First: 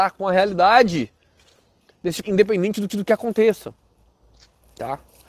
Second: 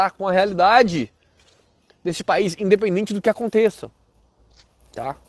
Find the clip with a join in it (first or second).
first